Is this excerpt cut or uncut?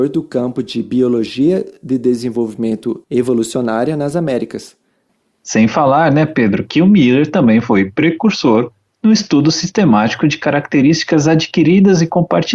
uncut